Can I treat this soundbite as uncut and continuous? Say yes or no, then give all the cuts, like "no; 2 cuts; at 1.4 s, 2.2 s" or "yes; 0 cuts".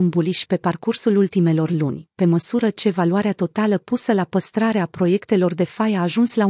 yes; 0 cuts